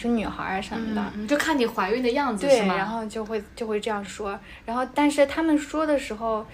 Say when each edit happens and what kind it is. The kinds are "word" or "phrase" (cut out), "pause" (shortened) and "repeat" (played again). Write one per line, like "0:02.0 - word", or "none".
none